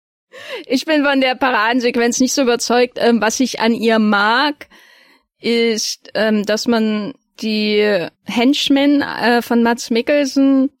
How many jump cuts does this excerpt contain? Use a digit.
0